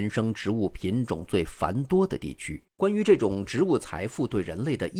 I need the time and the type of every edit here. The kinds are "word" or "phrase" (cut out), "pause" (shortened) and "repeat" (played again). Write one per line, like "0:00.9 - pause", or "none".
0:02.7 - pause